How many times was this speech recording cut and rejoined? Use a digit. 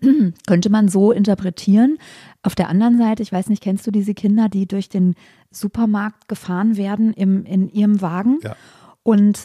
0